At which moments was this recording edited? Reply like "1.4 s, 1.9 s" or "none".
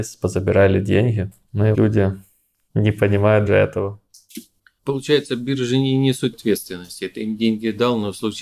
1.7 s, 3.5 s, 6.3 s